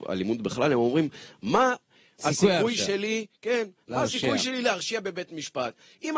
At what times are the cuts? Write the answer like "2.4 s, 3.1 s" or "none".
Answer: none